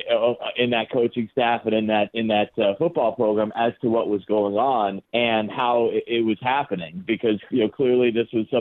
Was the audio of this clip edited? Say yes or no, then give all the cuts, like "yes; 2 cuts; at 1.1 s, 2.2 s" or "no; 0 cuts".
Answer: yes; 1 cut; at 5.0 s